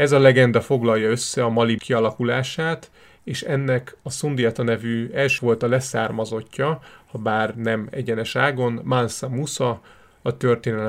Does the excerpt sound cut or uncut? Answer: cut